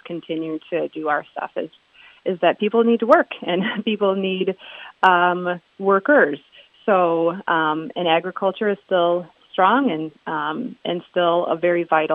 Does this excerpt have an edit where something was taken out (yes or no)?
no